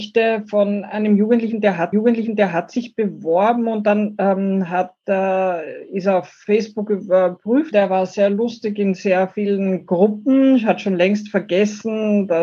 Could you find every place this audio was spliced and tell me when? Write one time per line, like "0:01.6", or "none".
0:01.9
0:07.7